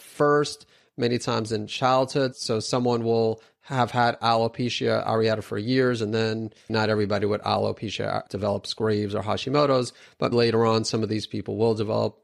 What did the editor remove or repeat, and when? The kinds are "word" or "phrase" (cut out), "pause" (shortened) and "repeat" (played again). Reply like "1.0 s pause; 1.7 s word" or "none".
6.7 s word; 8.3 s word; 10.3 s word

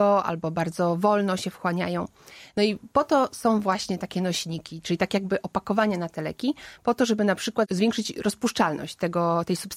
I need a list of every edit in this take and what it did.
none

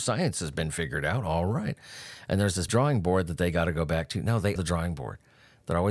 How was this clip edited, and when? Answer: 2.7 s word; 4.6 s word

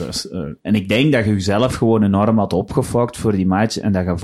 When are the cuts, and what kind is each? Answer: none

